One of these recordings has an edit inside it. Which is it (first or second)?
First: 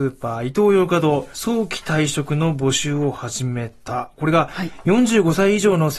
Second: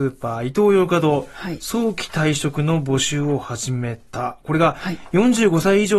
first